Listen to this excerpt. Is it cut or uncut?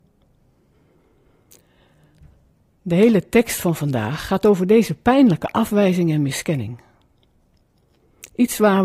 uncut